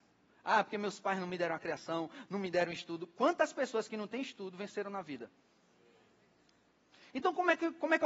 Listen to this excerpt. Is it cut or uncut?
uncut